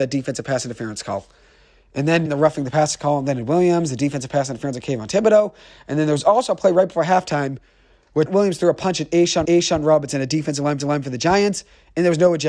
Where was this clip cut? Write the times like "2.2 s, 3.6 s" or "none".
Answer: 2.3 s, 8.3 s, 9.4 s, 10.8 s